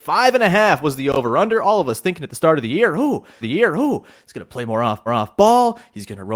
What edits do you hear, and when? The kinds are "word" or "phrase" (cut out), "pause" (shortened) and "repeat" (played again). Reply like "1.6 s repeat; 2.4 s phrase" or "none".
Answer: 3.4 s repeat; 5.1 s repeat